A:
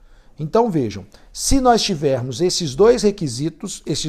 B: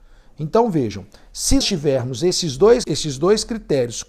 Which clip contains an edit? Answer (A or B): B